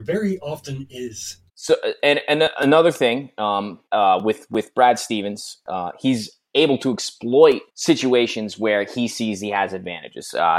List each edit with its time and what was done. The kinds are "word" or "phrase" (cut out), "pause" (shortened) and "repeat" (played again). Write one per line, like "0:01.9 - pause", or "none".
0:01.5 - pause
0:03.9 - pause
0:07.7 - pause